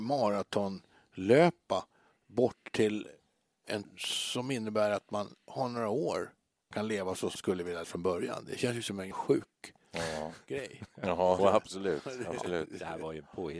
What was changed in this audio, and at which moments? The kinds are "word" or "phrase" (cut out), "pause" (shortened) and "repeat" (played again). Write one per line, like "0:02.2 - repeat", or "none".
0:03.8 - word
0:06.7 - word
0:07.3 - word
0:07.8 - word
0:09.1 - word
0:11.4 - word